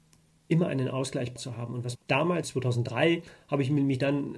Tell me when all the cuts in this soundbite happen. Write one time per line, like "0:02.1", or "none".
0:01.4
0:01.9
0:02.4